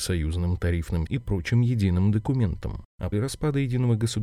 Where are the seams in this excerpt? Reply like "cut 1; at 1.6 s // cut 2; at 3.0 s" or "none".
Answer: cut 1; at 1.1 s // cut 2; at 3.1 s